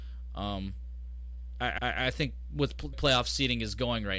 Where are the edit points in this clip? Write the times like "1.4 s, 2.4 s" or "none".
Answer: 1.8 s, 2.9 s